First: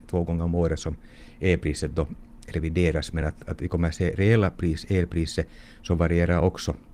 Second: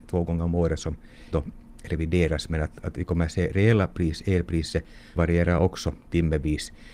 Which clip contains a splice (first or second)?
second